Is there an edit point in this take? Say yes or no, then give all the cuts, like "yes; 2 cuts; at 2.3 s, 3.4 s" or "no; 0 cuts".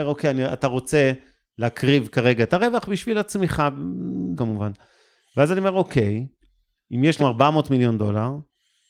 yes; 3 cuts; at 2.5 s, 4.4 s, 7.2 s